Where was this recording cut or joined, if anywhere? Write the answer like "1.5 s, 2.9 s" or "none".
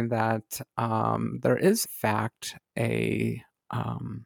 1.9 s